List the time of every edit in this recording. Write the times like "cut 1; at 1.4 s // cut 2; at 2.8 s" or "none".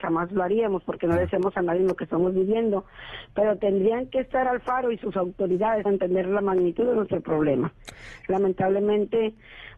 cut 1; at 5.9 s